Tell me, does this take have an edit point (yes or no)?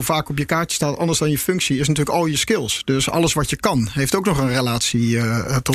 no